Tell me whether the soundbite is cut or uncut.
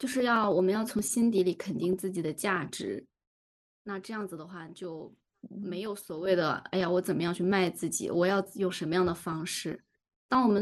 uncut